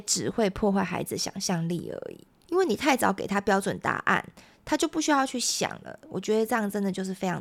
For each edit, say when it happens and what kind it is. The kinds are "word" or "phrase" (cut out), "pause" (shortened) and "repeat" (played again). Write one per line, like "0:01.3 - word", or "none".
0:02.3 - pause